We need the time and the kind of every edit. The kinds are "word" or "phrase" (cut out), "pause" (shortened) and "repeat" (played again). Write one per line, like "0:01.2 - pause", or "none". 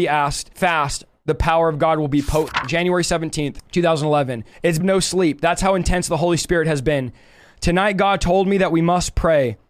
0:04.8 - phrase

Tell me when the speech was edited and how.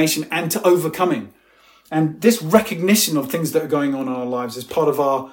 none

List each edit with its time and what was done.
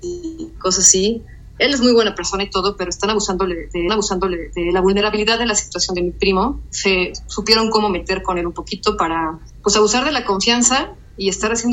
0:03.9 - repeat

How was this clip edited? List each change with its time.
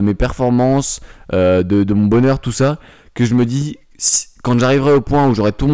none

